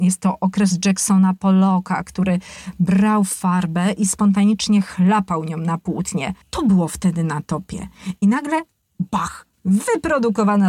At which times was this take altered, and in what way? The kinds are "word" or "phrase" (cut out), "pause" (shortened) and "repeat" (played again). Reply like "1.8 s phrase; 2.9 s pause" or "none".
6.4 s pause; 9.5 s pause